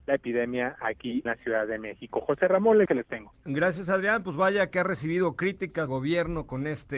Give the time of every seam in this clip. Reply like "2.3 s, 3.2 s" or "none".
1.3 s, 2.9 s, 5.9 s